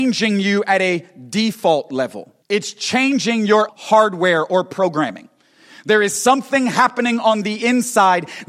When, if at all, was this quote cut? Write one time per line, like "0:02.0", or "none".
0:02.4
0:03.7